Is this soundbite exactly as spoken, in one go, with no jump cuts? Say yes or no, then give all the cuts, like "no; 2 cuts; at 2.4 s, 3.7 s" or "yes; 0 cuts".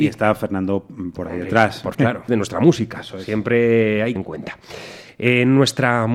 no; 4 cuts; at 1.1 s, 1.9 s, 2.3 s, 4.2 s